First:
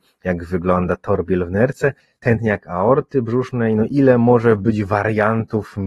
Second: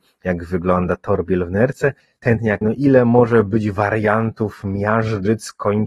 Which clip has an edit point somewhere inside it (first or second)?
second